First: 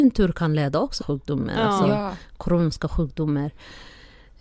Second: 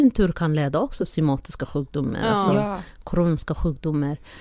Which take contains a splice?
first; 1 cut; at 1.0 s

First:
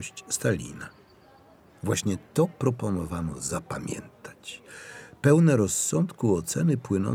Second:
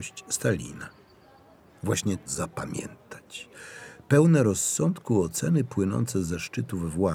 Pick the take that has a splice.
second; 1 cut; at 2.3 s

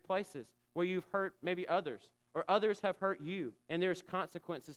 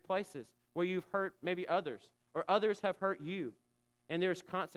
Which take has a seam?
first; 1 cut; at 3.6 s

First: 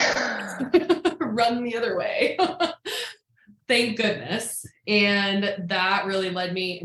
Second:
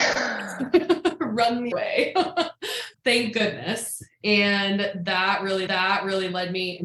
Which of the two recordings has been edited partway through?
second; 3 cuts; at 1.7 s, 2.9 s, 5.7 s

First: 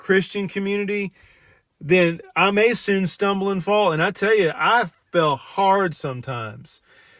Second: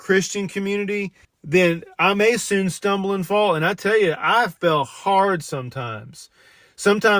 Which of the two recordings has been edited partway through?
second; 2 cuts; at 1.2 s, 4.6 s

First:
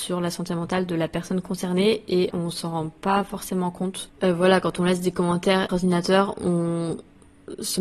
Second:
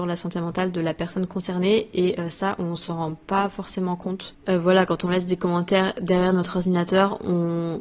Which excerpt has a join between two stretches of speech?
first; 2 cuts; at 2.3 s, 5.7 s

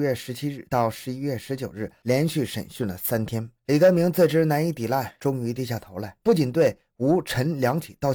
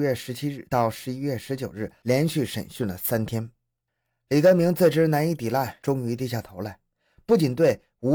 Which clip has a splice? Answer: first; 2 cuts; at 3.6 s, 6.2 s

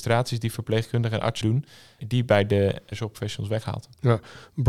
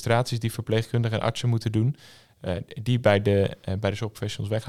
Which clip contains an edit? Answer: first; 3 cuts; at 1.4 s, 2.0 s, 2.9 s

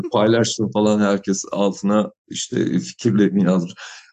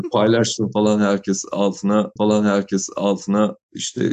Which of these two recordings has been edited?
second; 1 cut; at 2.2 s

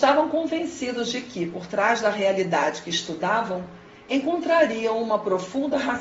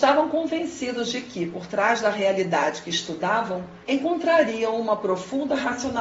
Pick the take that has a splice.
second; 1 cut; at 3.8 s

